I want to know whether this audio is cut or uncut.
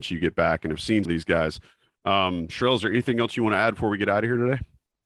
cut